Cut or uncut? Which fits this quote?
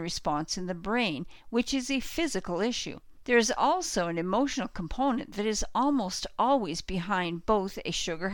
uncut